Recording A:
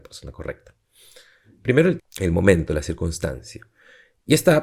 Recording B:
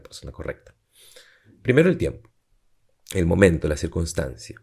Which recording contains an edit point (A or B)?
A